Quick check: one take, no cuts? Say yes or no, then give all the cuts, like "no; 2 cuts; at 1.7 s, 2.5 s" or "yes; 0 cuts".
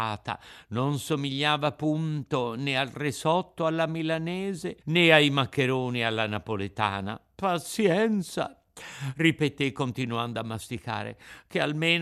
no; 1 cut; at 4.8 s